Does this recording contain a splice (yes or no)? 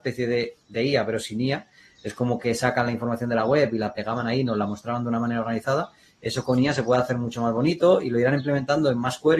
no